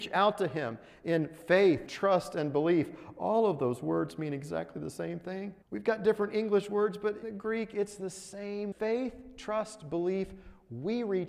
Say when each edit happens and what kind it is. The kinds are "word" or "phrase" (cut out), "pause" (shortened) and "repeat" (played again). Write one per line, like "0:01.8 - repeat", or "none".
0:01.9 - word
0:05.6 - pause
0:07.2 - word
0:08.7 - word